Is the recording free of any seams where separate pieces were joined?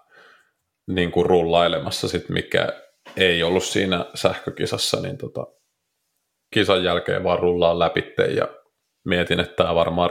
no; 1 cut; at 6.5 s

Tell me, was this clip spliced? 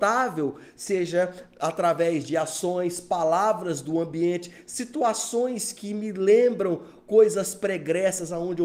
no; 0 cuts

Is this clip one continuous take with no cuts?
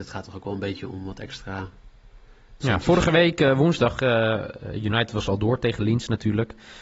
yes; 0 cuts

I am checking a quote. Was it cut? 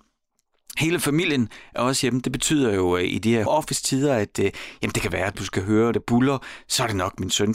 yes; 3 cuts; at 3.5 s, 5.3 s, 5.9 s

